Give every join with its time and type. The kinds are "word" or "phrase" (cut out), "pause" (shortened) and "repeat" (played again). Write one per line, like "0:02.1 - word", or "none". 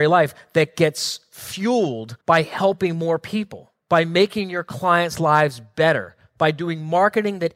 0:02.2 - pause
0:03.8 - pause